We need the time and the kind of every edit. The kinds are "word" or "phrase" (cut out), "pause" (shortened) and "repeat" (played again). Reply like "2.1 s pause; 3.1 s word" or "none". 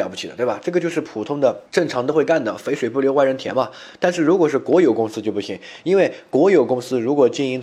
1.7 s pause